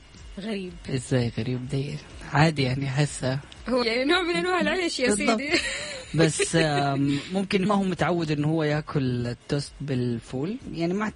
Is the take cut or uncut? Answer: cut